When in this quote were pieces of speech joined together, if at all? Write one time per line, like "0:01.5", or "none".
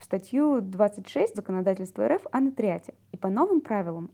0:01.3
0:03.0